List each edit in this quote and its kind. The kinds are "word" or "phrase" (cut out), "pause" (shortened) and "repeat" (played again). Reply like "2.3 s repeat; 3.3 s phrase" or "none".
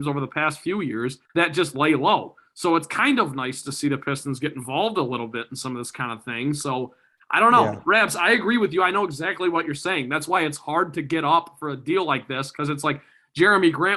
1.3 s pause